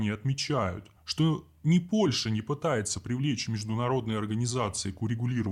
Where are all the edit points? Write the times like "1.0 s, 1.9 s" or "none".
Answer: 1.0 s